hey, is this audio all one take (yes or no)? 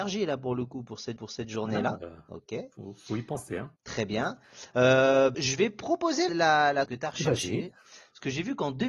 no